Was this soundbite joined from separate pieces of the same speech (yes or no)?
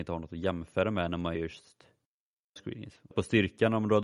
yes